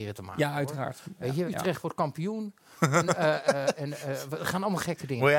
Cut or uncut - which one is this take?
cut